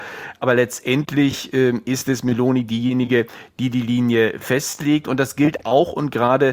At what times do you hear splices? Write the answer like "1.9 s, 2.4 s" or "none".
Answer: none

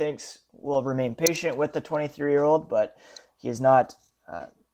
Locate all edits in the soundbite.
none

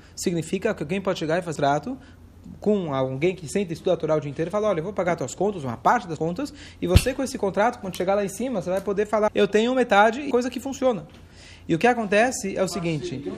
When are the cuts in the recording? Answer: 1.6 s, 6.2 s, 9.3 s, 10.3 s

